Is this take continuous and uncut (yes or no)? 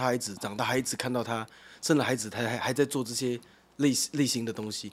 yes